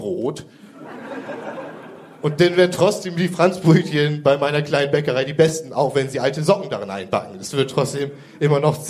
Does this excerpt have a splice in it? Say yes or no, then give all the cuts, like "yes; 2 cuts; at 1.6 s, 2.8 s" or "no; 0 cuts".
no; 0 cuts